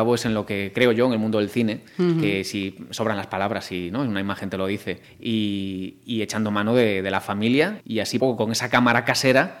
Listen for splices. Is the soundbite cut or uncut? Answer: cut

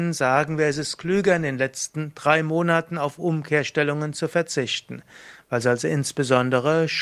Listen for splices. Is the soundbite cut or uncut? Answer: uncut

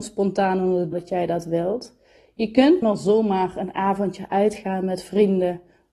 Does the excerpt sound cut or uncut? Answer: cut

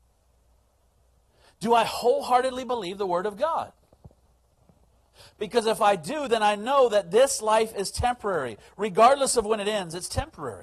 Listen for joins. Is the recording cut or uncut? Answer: uncut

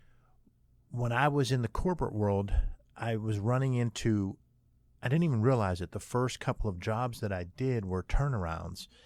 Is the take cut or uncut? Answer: uncut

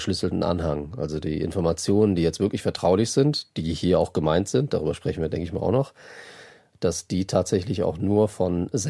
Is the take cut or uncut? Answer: uncut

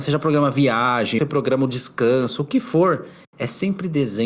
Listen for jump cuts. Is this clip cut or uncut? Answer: cut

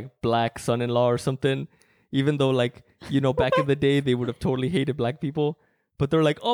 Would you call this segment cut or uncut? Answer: uncut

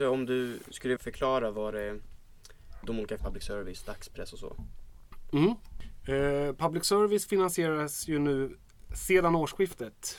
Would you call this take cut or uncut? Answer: cut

